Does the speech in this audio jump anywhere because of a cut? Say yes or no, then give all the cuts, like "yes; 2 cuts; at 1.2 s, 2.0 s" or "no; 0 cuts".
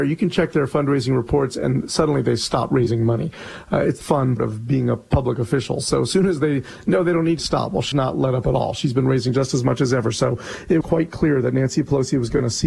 yes; 5 cuts; at 4.0 s, 4.4 s, 7.4 s, 7.9 s, 10.8 s